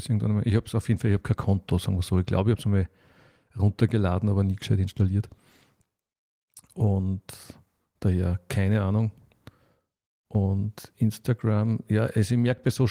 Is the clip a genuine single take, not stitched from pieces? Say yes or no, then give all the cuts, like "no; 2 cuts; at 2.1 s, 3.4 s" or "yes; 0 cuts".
yes; 0 cuts